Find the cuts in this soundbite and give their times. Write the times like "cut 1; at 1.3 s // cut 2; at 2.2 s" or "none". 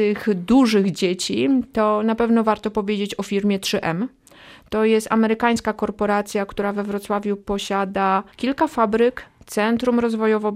cut 1; at 8.3 s